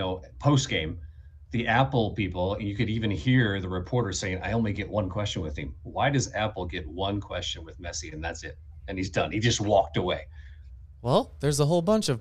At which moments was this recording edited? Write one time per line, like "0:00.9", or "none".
none